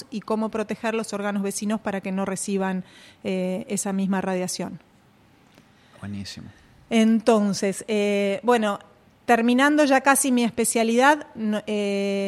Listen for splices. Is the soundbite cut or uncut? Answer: uncut